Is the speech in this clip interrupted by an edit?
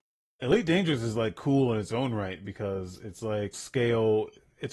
yes; 1 cut; at 3.5 s

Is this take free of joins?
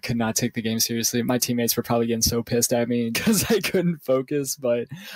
no; 1 cut; at 3.1 s

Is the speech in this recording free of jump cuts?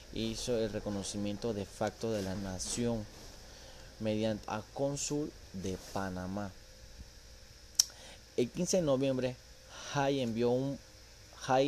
no; 2 cuts; at 2.3 s, 4.4 s

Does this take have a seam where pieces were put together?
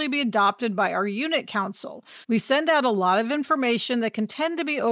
yes; 1 cut; at 2.2 s

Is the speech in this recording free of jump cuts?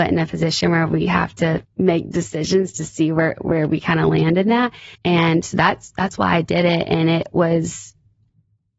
no; 2 cuts; at 1.6 s, 4.9 s

